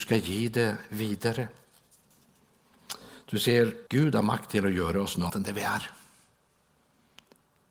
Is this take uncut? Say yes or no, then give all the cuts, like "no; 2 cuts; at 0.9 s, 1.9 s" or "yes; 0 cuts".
no; 2 cuts; at 3.9 s, 5.3 s